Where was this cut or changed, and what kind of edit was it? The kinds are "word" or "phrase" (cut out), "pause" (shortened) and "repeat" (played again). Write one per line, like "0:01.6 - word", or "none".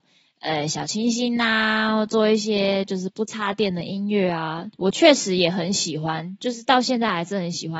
none